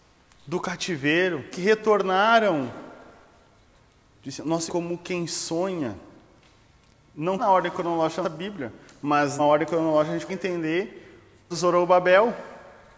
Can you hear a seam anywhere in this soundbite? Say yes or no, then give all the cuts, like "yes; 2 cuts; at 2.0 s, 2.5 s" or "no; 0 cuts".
yes; 7 cuts; at 1.5 s, 4.7 s, 7.4 s, 8.2 s, 9.4 s, 10.3 s, 11.5 s